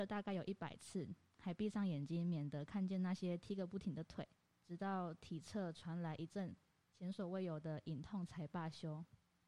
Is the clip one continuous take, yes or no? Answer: no